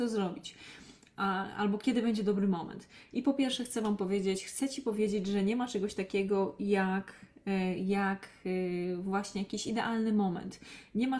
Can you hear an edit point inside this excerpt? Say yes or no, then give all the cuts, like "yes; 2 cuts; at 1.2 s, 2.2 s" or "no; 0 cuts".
no; 0 cuts